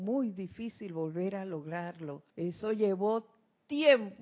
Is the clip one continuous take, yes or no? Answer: no